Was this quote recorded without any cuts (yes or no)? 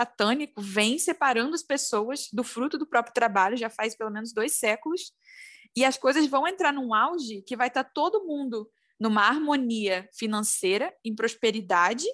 yes